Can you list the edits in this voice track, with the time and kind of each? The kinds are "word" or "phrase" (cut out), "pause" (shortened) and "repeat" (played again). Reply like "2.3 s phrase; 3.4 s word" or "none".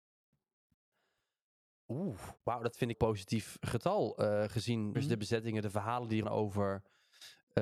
2.4 s pause; 2.9 s phrase; 4.9 s phrase; 6.2 s word